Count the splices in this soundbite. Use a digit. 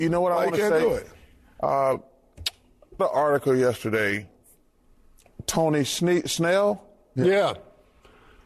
1